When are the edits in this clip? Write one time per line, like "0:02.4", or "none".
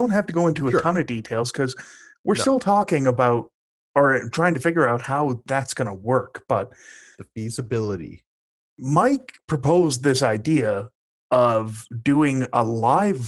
none